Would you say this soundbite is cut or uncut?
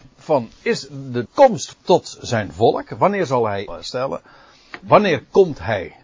cut